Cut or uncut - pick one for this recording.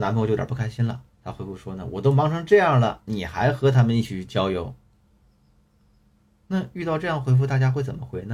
cut